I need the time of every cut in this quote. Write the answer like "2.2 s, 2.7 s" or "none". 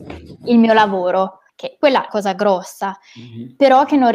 1.5 s, 2.1 s